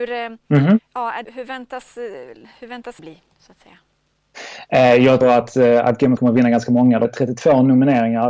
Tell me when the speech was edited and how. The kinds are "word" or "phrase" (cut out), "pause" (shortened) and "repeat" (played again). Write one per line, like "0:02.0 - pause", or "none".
0:01.2 - word
0:03.0 - word
0:05.2 - word
0:06.2 - word
0:07.0 - word